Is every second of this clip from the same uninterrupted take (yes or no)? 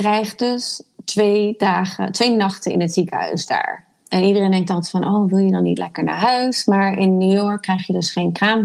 yes